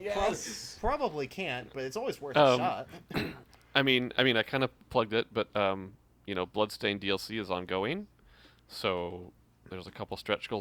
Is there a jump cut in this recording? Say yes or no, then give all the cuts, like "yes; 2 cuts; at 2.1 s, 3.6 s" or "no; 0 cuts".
no; 0 cuts